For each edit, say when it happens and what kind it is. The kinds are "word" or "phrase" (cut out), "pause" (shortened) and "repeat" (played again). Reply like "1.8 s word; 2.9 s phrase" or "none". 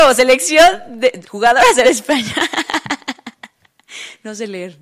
1.2 s word; 1.8 s phrase